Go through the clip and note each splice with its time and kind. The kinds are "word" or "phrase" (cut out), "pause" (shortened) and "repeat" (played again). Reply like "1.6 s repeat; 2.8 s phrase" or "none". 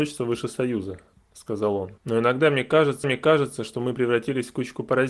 2.0 s pause; 3.0 s repeat